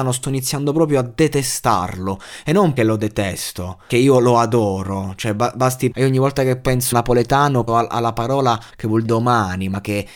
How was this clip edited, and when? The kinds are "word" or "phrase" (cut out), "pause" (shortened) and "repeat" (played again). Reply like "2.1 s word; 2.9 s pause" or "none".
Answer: 2.8 s word; 3.9 s word; 5.9 s word; 6.9 s word; 7.7 s word; 8.7 s word; 9.0 s word

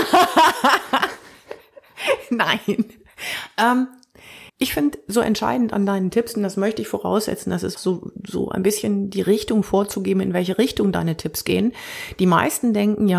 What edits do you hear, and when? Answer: 4.5 s pause; 7.7 s phrase

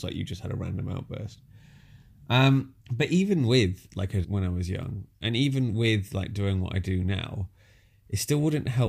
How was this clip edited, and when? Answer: 2.8 s pause; 4.2 s word

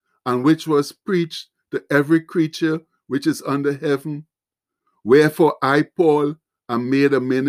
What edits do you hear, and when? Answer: none

